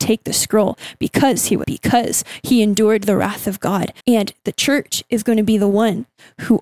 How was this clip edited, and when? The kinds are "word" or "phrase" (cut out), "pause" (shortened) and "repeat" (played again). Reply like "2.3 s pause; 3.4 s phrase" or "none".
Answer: 1.6 s word; 4.0 s pause